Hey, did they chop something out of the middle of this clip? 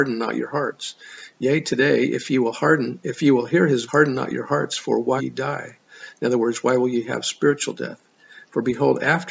yes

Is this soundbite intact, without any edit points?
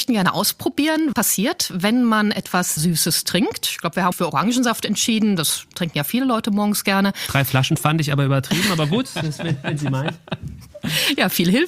no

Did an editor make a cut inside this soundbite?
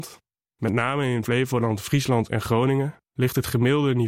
yes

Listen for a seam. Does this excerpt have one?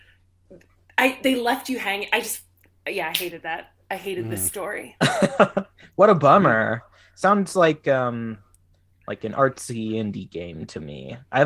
no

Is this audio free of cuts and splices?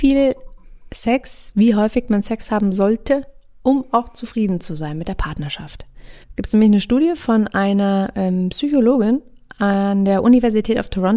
no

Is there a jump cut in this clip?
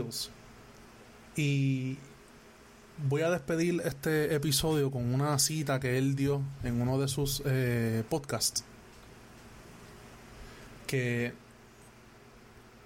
no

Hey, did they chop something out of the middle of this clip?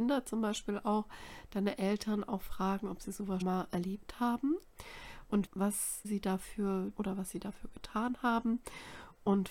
yes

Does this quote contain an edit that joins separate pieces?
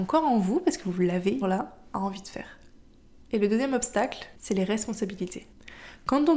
yes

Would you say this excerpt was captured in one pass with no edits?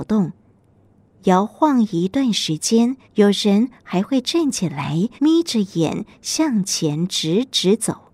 no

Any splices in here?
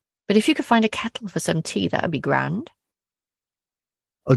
no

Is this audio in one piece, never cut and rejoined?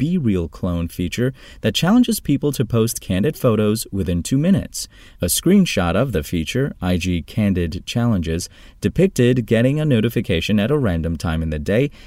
yes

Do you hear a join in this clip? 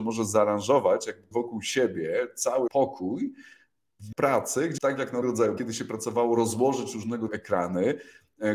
yes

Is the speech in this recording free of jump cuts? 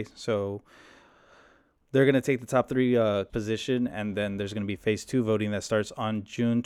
no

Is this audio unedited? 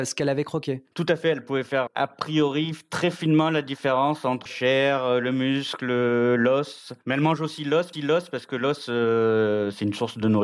no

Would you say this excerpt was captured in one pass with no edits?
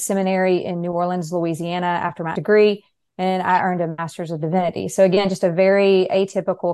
no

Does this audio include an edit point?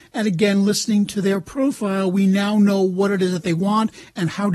no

